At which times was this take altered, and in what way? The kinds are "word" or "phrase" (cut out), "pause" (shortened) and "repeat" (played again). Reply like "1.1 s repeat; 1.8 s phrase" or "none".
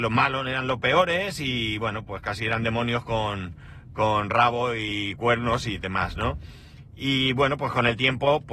none